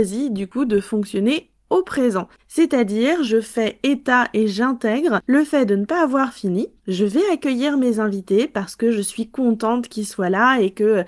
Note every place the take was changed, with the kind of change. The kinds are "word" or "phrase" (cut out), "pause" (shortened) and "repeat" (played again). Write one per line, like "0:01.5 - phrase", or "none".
0:02.4 - pause
0:06.8 - pause